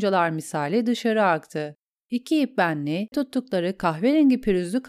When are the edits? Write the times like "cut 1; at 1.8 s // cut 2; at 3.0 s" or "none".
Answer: cut 1; at 3.1 s

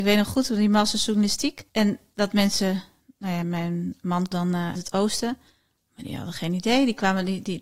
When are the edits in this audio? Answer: cut 1; at 1.7 s // cut 2; at 3.4 s // cut 3; at 4.3 s // cut 4; at 4.8 s

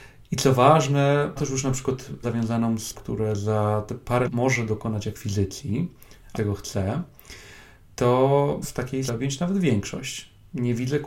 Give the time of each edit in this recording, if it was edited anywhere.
cut 1; at 1.4 s // cut 2; at 2.2 s // cut 3; at 2.9 s // cut 4; at 4.2 s // cut 5; at 6.3 s // cut 6; at 8.6 s // cut 7; at 9.1 s

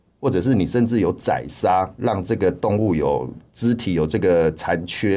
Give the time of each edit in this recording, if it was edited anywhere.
cut 1; at 3.5 s

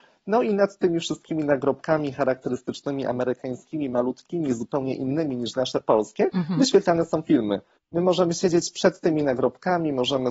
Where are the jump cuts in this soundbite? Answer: none

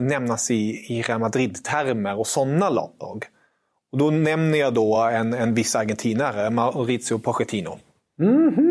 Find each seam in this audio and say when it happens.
none

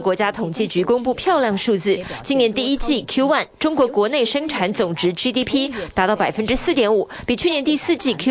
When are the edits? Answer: none

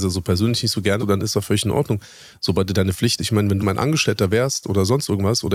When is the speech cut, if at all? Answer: cut 1; at 1.0 s // cut 2; at 3.2 s // cut 3; at 3.6 s

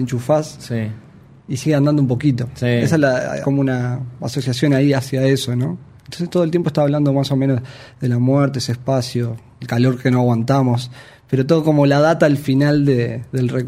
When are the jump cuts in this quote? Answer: cut 1; at 3.4 s // cut 2; at 9.6 s

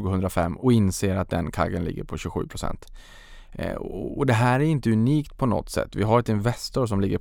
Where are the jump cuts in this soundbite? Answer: none

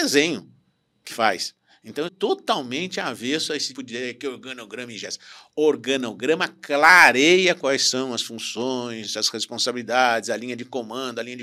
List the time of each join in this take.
cut 1; at 1.1 s // cut 2; at 2.1 s // cut 3; at 3.7 s

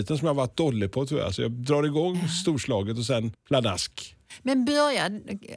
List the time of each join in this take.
none

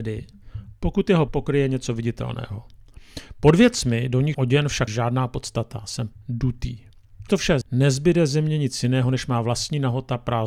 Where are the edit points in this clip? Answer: cut 1; at 1.3 s // cut 2; at 4.3 s // cut 3; at 4.9 s // cut 4; at 6.1 s // cut 5; at 7.3 s // cut 6; at 7.6 s

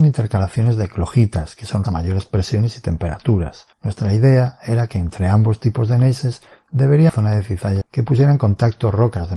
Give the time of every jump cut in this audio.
cut 1; at 1.8 s // cut 2; at 3.7 s // cut 3; at 7.1 s // cut 4; at 7.8 s

